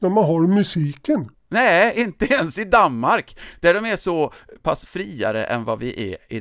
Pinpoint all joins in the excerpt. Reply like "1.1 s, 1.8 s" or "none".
none